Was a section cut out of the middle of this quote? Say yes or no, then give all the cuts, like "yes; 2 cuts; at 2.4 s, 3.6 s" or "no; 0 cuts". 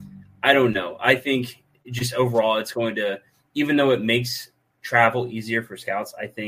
no; 0 cuts